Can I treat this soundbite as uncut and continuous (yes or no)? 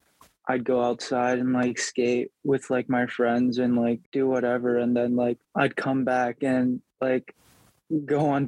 no